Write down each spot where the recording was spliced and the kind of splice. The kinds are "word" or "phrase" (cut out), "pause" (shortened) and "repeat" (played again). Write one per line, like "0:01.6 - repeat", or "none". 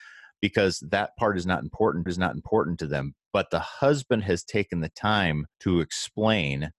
0:02.1 - repeat
0:05.5 - pause